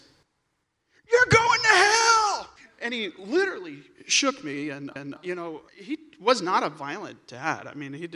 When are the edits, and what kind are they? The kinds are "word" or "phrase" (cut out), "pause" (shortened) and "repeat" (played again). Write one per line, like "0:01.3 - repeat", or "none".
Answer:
0:02.6 - pause
0:05.0 - repeat
0:05.7 - pause